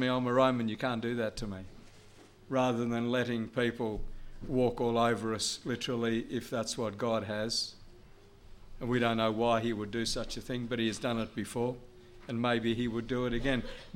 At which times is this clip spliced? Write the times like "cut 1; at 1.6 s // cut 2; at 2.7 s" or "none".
none